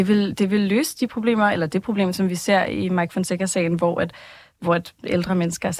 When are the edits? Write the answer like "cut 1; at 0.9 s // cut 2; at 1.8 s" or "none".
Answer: none